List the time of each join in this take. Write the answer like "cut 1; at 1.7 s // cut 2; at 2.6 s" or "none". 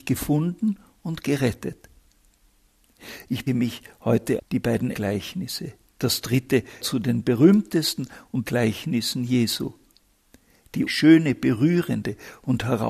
cut 1; at 3.5 s // cut 2; at 4.4 s // cut 3; at 4.9 s // cut 4; at 6.8 s // cut 5; at 8.4 s // cut 6; at 10.9 s